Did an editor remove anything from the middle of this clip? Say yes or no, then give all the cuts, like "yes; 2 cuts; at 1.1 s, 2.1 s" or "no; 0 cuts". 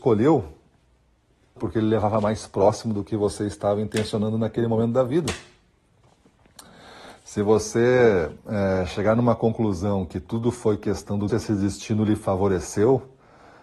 yes; 3 cuts; at 1.6 s, 8.4 s, 11.3 s